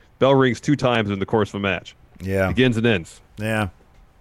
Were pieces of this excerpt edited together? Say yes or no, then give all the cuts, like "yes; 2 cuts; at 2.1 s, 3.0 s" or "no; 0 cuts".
no; 0 cuts